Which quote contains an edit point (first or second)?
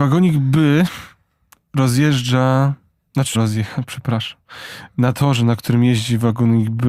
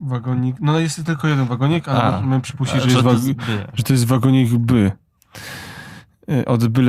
first